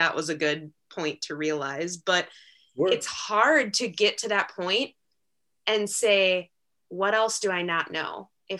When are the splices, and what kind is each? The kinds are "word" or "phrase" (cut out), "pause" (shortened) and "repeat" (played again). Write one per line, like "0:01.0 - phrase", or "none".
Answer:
none